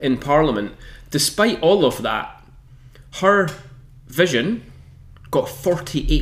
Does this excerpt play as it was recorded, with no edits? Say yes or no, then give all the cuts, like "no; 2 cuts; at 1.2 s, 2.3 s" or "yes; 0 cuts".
yes; 0 cuts